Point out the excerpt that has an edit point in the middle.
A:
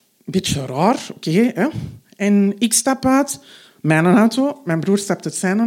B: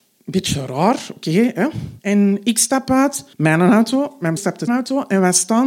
B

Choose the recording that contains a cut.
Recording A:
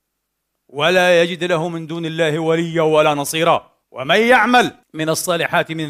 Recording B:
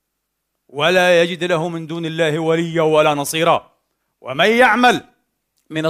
A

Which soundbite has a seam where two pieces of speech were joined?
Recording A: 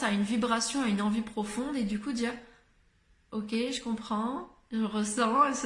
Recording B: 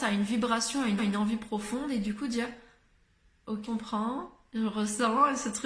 B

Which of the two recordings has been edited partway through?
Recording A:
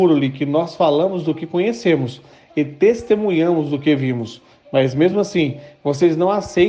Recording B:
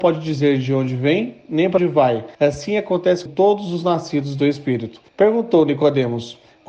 B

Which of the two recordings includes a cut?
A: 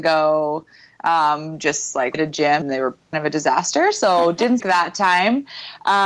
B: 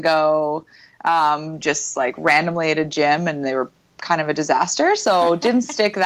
A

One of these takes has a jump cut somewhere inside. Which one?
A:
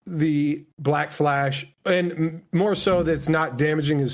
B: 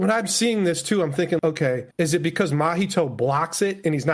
B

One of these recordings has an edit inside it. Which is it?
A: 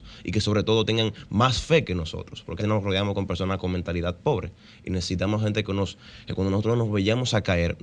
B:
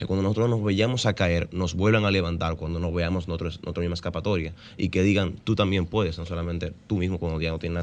A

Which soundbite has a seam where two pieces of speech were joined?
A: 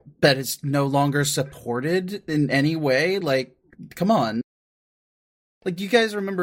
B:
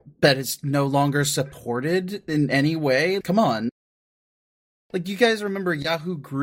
B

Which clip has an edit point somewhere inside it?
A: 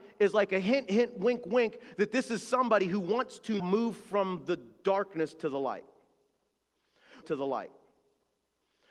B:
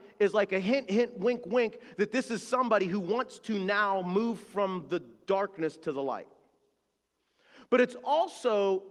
A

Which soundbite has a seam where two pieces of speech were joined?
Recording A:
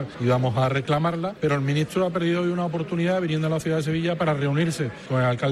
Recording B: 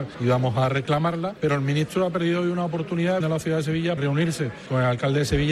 B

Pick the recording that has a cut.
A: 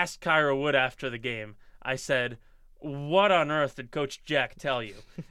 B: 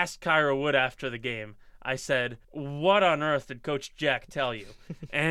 B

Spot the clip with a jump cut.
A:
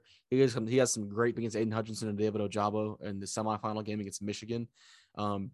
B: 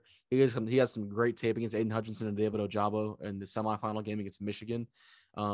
A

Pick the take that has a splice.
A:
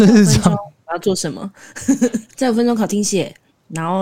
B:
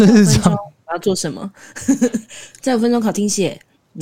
A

